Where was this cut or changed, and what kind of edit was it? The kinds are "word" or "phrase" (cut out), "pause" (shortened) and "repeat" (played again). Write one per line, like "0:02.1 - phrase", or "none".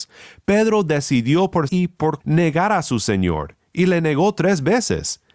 0:01.7 - word
0:02.2 - word